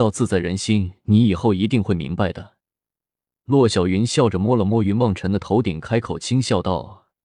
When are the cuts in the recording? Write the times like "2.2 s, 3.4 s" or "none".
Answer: none